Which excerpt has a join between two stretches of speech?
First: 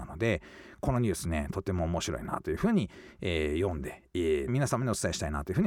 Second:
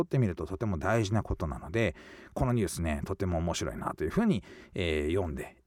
first; 1 cut; at 4.5 s

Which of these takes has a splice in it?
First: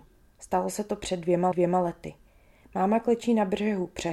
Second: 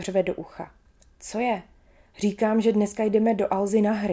first; 1 cut; at 1.5 s

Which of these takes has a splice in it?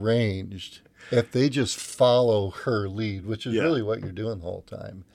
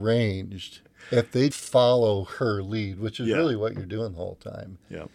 second; 1 cut; at 1.5 s

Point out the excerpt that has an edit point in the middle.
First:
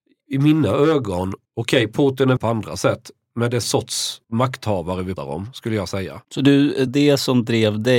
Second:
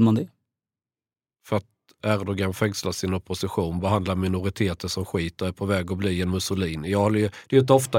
first; 7 cuts; at 1.4 s, 2.4 s, 3.6 s, 4.2 s, 5.2 s, 6.2 s, 6.9 s

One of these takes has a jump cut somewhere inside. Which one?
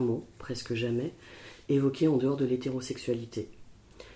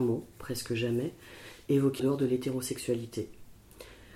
second; 1 cut; at 2.0 s

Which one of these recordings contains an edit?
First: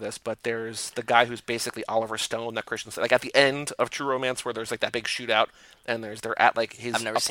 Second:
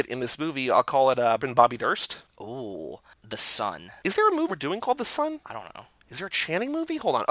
second; 2 cuts; at 1.4 s, 4.5 s

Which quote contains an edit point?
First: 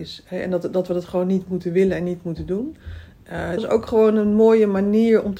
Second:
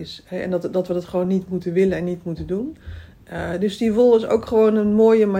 first; 1 cut; at 3.6 s

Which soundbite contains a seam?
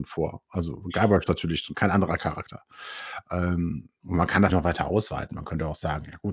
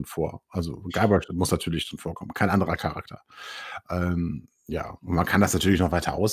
first; 4 cuts; at 1.3 s, 1.7 s, 4.0 s, 4.5 s

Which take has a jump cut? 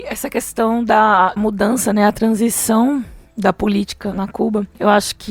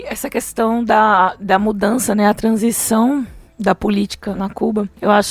first; 1 cut; at 1.4 s

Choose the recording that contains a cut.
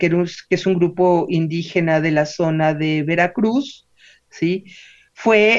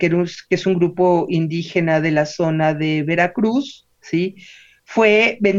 second; 1 cut; at 3.9 s

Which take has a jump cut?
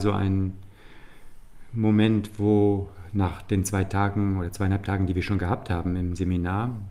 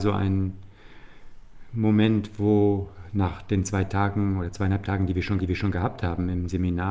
second; 1 cut; at 5.4 s

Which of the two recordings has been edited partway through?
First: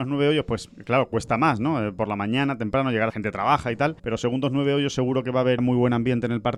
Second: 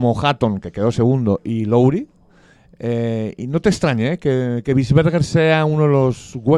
first; 3 cuts; at 3.1 s, 4.0 s, 5.6 s

